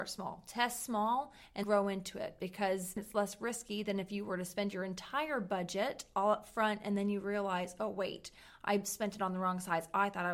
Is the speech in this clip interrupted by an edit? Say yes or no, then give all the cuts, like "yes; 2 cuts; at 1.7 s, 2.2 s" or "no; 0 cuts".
yes; 1 cut; at 1.6 s